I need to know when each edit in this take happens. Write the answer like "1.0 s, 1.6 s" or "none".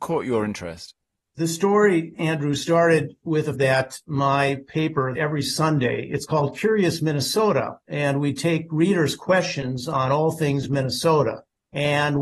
3.5 s, 5.2 s

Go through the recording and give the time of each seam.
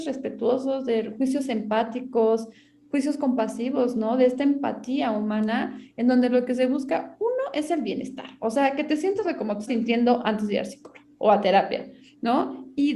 9.2 s, 9.7 s, 11.1 s

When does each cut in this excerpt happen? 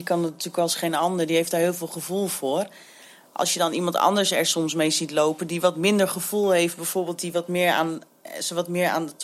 none

